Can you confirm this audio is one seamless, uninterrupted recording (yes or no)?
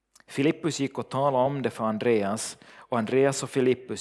yes